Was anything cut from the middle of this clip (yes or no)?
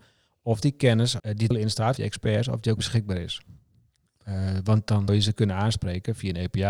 yes